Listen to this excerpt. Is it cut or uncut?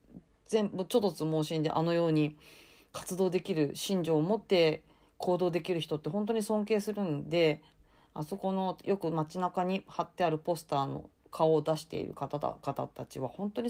uncut